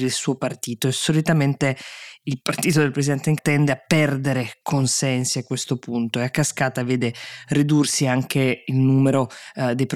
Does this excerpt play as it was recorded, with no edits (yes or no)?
no